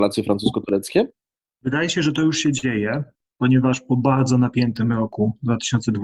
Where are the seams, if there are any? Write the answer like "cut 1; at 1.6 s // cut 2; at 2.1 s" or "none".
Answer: none